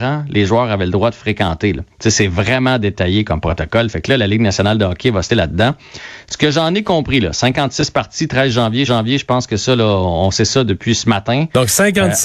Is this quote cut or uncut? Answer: cut